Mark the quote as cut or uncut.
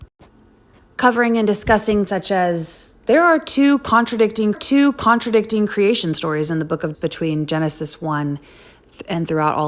cut